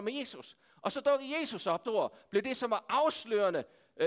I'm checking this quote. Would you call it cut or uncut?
cut